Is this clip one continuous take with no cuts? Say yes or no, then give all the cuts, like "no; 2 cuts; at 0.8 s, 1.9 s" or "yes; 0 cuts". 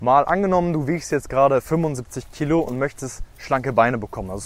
yes; 0 cuts